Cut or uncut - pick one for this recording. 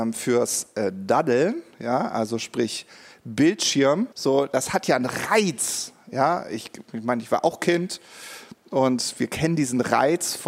cut